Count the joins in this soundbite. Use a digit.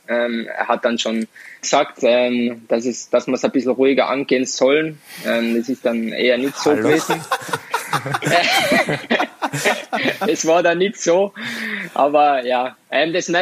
1